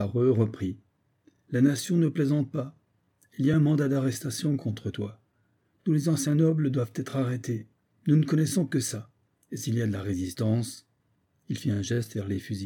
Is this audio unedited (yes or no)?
yes